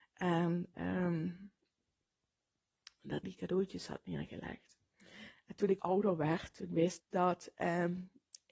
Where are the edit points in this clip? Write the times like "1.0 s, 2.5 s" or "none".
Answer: 3.2 s, 5.8 s, 7.0 s